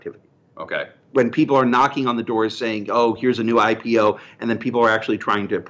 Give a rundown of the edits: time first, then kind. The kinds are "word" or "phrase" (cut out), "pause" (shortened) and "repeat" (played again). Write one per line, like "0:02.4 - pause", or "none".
none